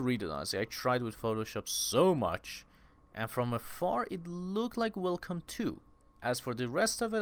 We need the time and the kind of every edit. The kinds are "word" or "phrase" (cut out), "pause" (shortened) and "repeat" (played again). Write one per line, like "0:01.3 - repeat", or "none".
none